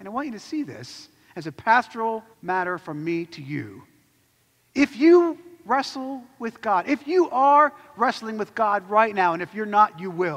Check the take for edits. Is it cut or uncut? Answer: cut